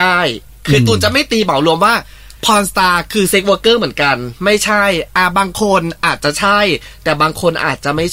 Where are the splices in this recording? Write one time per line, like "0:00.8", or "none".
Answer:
0:02.4

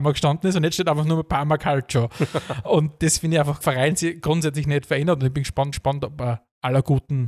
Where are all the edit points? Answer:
0:03.6
0:05.7

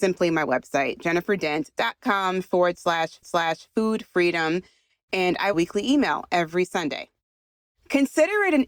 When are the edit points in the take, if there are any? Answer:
0:03.2
0:05.5

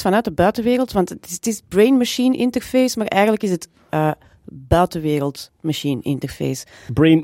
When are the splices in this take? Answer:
none

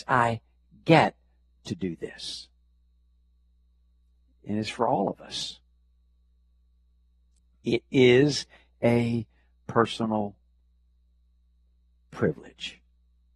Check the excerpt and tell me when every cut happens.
none

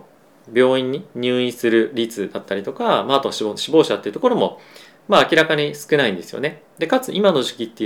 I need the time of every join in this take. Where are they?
none

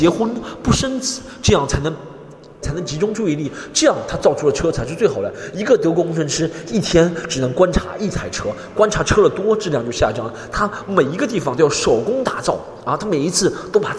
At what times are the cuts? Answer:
0:02.6

